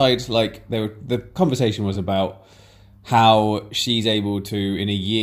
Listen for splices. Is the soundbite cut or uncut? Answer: uncut